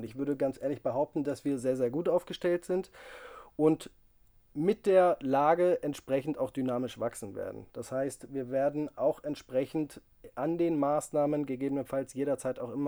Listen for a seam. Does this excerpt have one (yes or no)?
no